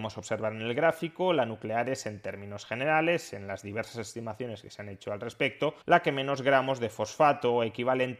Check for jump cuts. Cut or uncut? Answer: cut